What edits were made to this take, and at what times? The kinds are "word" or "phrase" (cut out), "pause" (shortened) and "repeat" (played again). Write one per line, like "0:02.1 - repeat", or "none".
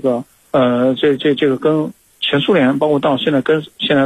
none